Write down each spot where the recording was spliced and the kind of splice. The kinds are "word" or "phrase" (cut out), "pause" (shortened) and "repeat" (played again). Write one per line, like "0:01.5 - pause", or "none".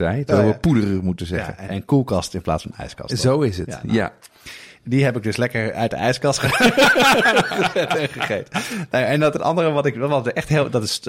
0:01.7 - word
0:09.4 - word

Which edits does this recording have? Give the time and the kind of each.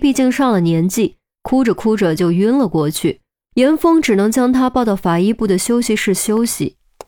0:03.3 - pause

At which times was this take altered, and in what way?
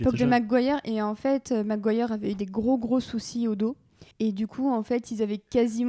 0:04.1 - pause

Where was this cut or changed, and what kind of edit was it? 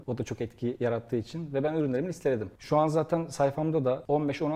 none

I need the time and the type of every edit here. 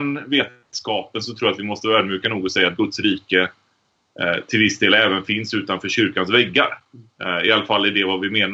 none

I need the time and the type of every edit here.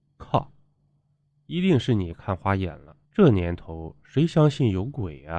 0:03.0 - pause

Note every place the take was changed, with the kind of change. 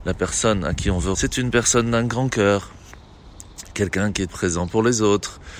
0:01.1 - word
0:04.3 - word

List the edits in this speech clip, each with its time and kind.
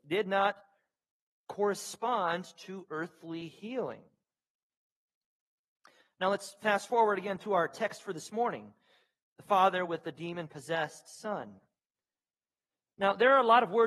none

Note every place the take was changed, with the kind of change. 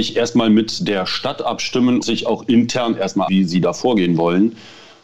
0:02.0 - word
0:03.3 - word

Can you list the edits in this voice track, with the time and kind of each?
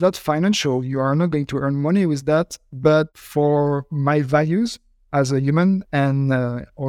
none

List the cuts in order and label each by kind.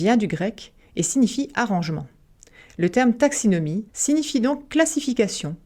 0:03.9 - pause

